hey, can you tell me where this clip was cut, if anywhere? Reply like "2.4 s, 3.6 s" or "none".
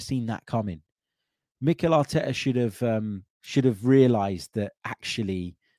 3.3 s